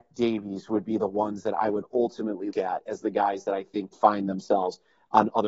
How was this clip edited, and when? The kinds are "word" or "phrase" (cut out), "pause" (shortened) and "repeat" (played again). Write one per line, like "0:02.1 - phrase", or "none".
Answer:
0:02.5 - word
0:03.9 - word